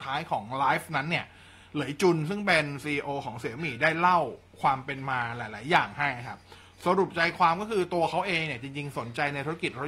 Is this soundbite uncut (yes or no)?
yes